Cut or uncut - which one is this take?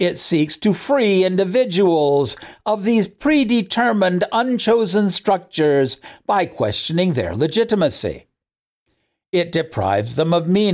uncut